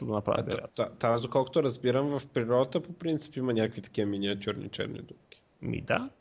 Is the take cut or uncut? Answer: uncut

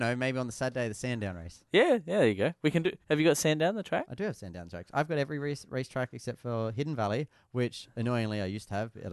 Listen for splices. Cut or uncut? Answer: cut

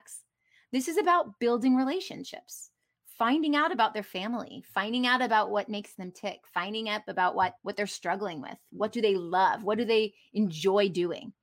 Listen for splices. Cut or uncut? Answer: cut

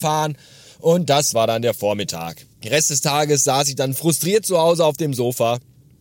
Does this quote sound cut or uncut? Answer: cut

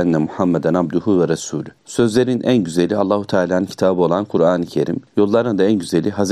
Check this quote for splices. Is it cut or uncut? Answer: cut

